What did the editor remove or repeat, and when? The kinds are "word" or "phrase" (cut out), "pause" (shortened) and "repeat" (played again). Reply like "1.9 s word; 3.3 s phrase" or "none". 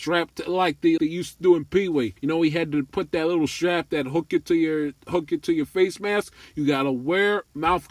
1.0 s word; 2.2 s pause